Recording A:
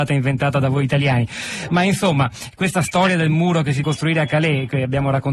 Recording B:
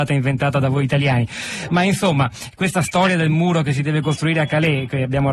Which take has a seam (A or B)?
A